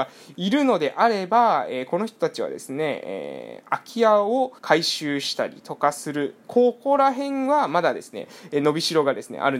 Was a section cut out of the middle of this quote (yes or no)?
yes